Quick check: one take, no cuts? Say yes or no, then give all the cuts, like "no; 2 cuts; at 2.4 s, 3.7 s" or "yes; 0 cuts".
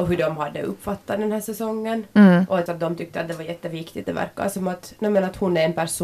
no; 2 cuts; at 2.7 s, 4.0 s